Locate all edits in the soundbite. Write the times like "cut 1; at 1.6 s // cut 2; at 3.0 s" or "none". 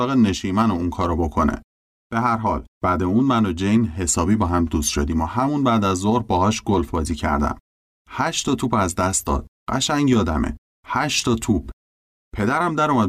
none